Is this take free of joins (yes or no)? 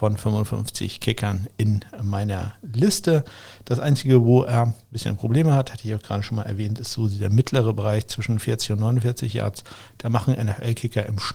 yes